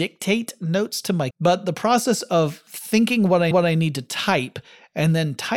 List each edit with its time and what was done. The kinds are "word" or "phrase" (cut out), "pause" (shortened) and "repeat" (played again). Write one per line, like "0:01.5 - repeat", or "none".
0:01.3 - word
0:03.5 - repeat